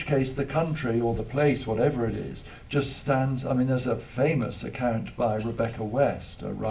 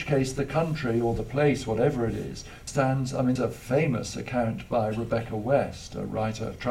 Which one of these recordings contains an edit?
second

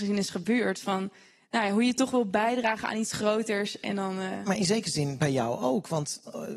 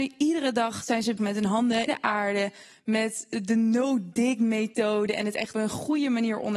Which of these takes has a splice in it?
second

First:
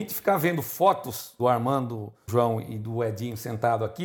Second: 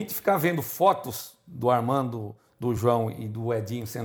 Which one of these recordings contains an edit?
first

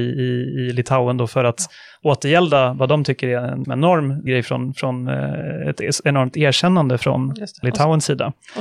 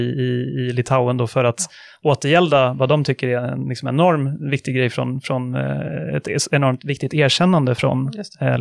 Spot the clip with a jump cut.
first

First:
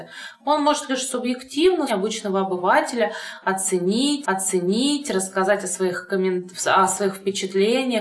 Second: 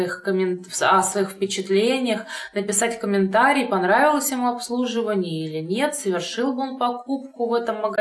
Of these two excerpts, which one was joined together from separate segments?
first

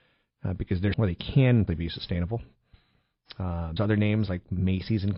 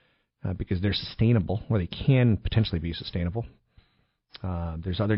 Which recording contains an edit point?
first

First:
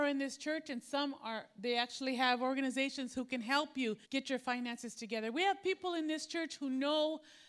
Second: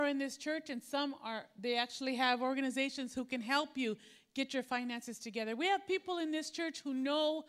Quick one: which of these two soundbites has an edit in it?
first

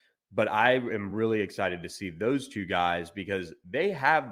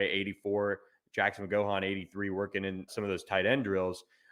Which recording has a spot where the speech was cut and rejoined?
second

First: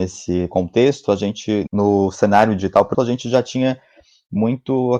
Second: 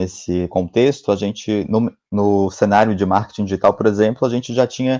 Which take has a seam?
first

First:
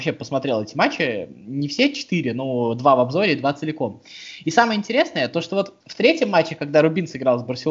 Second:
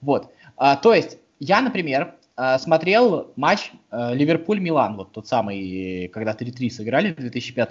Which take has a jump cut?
first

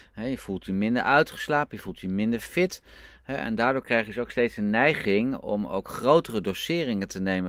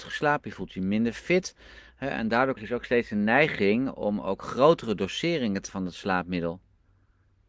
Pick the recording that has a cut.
second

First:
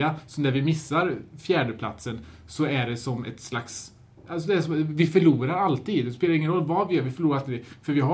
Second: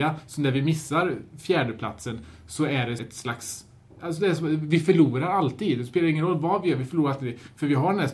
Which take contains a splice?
second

